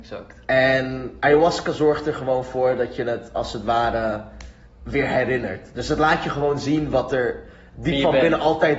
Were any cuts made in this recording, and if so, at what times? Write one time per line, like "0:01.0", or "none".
none